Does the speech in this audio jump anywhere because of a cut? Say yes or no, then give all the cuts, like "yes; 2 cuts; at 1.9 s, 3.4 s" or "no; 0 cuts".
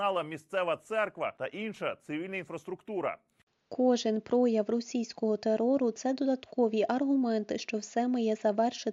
no; 0 cuts